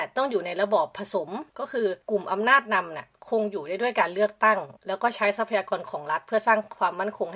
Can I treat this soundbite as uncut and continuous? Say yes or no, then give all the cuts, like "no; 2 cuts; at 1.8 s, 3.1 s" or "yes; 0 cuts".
no; 3 cuts; at 1.5 s, 2.0 s, 4.8 s